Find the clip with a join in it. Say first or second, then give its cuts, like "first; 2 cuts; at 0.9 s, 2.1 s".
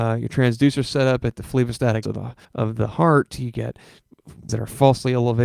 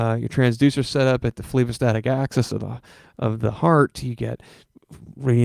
first; 3 cuts; at 2.0 s, 2.4 s, 4.5 s